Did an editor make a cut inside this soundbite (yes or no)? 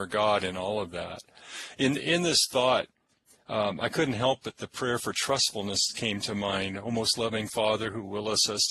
no